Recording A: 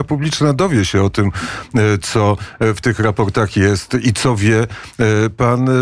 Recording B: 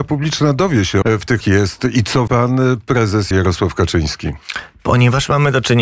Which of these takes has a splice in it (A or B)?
B